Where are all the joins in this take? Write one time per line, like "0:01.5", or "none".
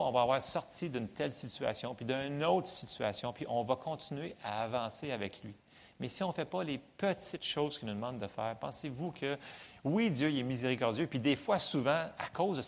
none